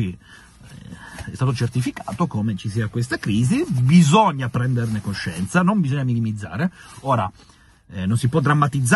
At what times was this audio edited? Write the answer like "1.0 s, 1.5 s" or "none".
none